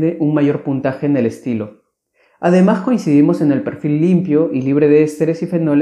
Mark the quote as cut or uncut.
uncut